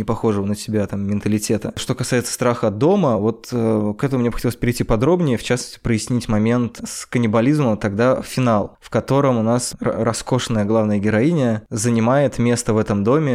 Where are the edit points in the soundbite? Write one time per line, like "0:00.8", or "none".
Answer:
none